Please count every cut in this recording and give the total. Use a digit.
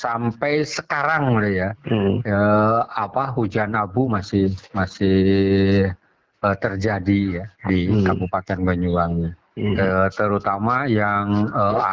0